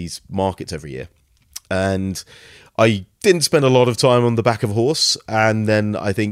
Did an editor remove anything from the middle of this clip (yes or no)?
no